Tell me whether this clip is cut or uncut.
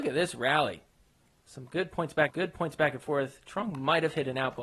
cut